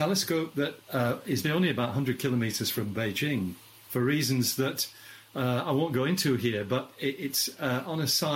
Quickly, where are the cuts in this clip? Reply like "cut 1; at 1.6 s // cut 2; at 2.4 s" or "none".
cut 1; at 1.4 s // cut 2; at 3.9 s